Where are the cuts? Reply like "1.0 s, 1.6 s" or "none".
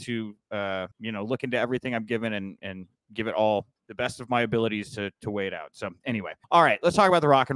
0.9 s, 3.8 s, 6.4 s

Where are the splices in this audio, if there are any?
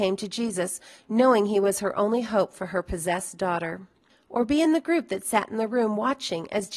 none

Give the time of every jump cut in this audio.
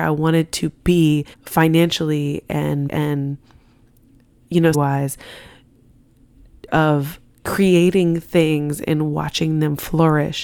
1.3 s, 2.9 s, 4.7 s, 6.7 s

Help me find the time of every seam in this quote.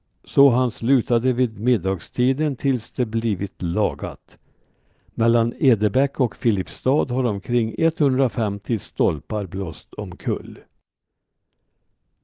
none

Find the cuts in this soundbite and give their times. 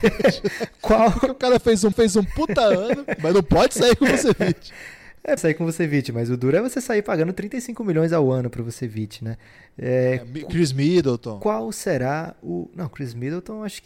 1.9 s, 3.2 s, 5.4 s

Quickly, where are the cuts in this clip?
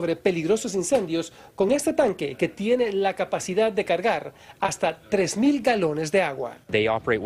none

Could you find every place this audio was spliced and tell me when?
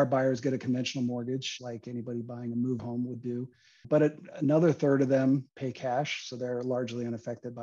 1.6 s, 2.8 s, 3.8 s

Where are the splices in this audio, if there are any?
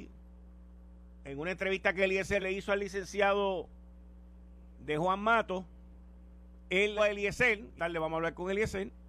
2.4 s, 7.0 s, 7.8 s

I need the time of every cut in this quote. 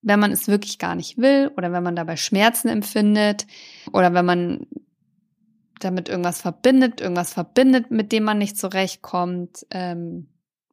7.0 s

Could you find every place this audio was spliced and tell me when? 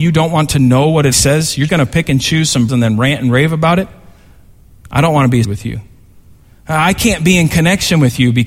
1.1 s, 1.7 s, 2.7 s, 5.4 s

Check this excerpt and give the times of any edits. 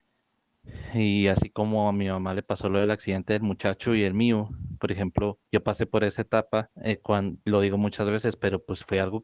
5.4 s, 6.7 s

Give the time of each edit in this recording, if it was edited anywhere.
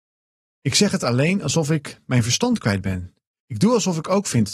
3.3 s

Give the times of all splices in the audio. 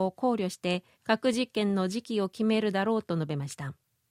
0.9 s

